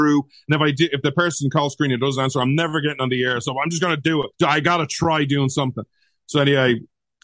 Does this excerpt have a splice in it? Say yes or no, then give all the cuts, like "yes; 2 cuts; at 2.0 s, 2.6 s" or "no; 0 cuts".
yes; 1 cut; at 4.3 s